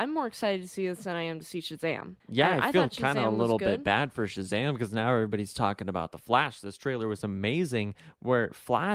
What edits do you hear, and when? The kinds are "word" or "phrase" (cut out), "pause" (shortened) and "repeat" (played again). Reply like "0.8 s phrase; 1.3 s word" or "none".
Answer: 2.2 s pause